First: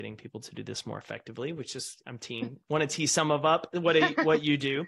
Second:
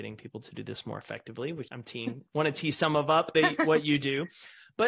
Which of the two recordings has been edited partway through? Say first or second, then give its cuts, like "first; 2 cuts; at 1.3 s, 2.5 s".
second; 2 cuts; at 1.7 s, 3.3 s